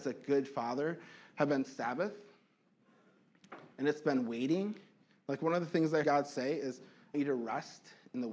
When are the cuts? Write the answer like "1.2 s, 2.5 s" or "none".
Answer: 6.0 s, 7.1 s